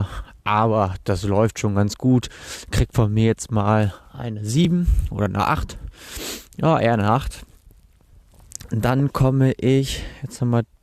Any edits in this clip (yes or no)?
no